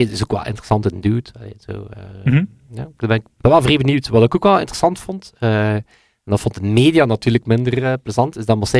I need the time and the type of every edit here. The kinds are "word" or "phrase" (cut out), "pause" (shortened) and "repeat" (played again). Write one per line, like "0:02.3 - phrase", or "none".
0:03.4 - word